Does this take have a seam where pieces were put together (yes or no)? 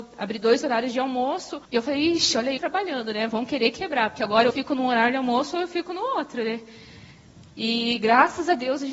yes